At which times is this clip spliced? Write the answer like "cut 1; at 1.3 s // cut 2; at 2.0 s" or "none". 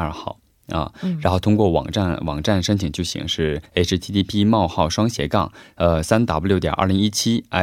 cut 1; at 3.7 s